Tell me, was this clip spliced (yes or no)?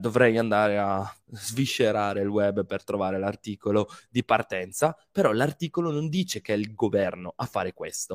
yes